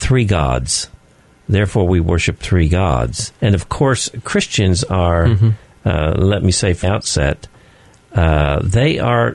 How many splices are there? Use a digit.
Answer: 2